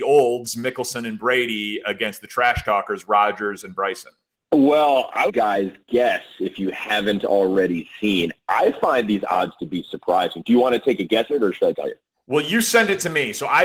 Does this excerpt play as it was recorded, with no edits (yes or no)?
no